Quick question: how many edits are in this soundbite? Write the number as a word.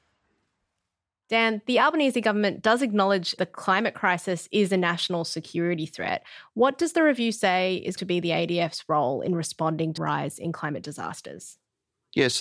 three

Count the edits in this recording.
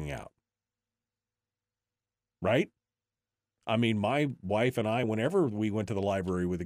zero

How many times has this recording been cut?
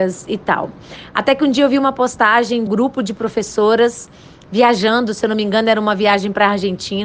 one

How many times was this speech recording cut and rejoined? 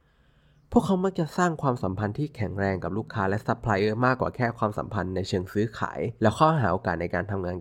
one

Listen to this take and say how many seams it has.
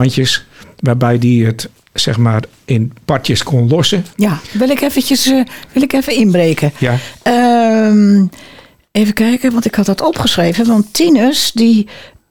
one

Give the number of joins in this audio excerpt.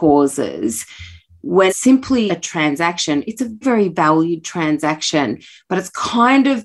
three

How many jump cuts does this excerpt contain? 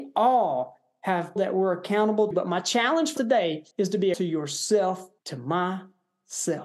six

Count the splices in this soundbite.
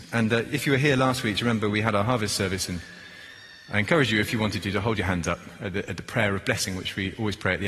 zero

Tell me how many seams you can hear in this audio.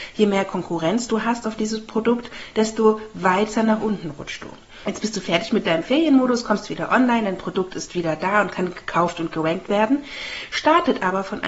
zero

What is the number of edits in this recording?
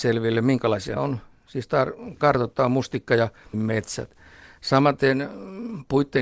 three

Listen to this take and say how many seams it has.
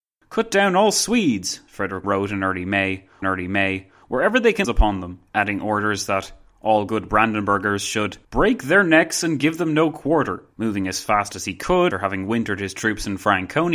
seven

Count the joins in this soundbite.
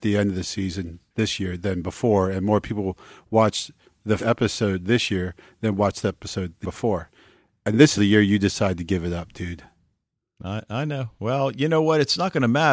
four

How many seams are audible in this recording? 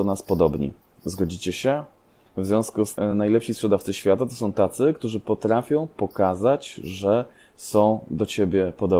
zero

